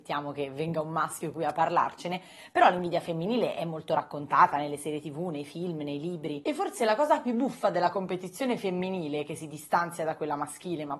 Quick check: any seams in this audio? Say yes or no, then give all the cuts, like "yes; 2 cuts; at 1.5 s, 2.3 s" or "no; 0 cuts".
no; 0 cuts